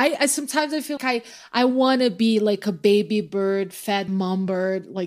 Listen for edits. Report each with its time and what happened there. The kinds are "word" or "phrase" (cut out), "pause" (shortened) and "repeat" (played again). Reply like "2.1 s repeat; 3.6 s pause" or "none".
1.0 s word; 4.1 s phrase